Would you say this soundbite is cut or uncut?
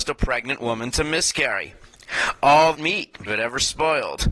cut